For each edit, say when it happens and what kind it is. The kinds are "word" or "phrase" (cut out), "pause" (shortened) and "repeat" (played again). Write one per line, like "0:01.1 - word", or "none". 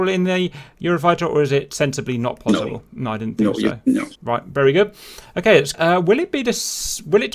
0:04.1 - pause
0:05.7 - phrase